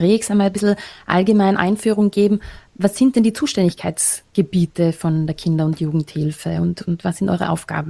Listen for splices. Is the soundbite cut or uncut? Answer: uncut